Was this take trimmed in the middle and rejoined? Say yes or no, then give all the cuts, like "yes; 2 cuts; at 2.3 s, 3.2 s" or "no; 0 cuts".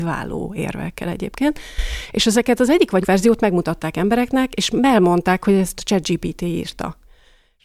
yes; 1 cut; at 3.0 s